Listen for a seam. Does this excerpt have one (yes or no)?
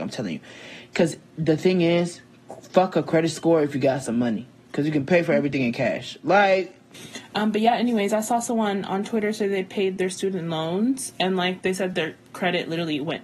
no